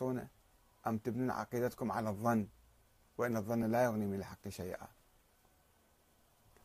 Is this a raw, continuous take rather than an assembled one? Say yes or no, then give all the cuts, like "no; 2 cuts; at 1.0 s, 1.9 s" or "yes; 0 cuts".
yes; 0 cuts